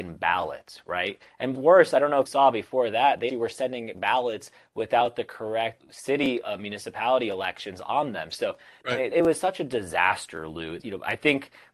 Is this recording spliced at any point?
yes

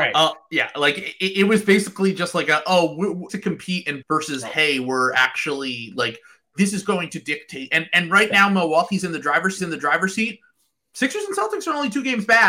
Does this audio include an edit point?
yes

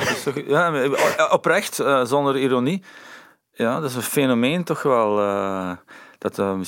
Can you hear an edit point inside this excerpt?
no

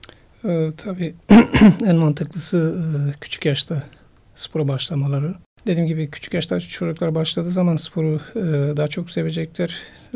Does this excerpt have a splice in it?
no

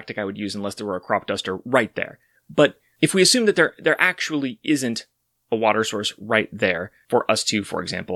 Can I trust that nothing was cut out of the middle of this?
yes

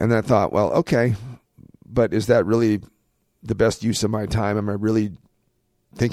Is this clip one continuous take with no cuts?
yes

